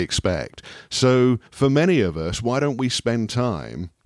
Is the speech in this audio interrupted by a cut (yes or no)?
yes